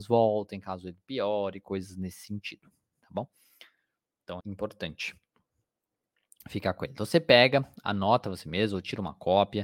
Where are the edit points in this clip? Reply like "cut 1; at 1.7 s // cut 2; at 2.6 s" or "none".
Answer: cut 1; at 4.4 s